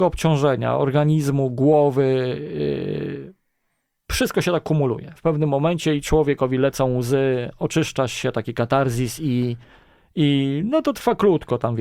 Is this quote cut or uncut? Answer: uncut